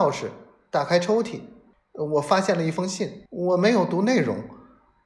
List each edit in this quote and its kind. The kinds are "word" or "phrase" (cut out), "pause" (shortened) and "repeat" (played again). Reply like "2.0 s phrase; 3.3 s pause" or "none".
1.7 s pause; 3.3 s pause